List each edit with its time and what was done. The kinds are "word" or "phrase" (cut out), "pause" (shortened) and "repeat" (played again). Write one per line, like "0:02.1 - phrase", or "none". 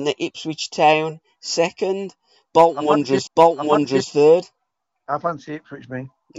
0:03.3 - repeat